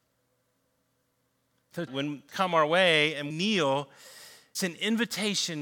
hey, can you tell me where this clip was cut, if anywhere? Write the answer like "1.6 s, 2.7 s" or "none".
1.9 s, 2.3 s, 3.3 s, 4.5 s